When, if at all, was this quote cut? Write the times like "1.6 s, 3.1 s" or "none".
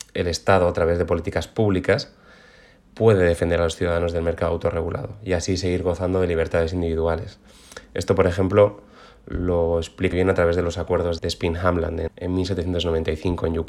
10.1 s, 11.2 s, 12.1 s